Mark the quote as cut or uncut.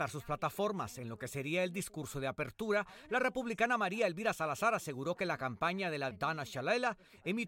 cut